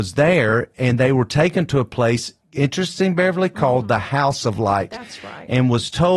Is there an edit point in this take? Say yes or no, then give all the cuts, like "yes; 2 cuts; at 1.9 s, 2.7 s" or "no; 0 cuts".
no; 0 cuts